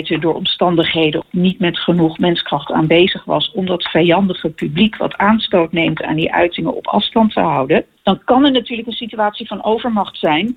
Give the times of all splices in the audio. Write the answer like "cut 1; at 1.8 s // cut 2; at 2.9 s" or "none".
none